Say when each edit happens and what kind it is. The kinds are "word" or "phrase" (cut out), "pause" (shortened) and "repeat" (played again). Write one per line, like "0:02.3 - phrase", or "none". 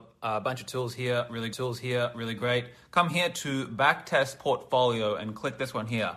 0:01.5 - repeat